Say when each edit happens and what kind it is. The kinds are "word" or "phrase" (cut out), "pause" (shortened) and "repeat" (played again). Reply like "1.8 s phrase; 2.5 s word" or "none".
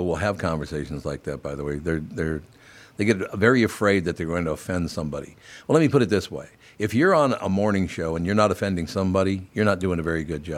none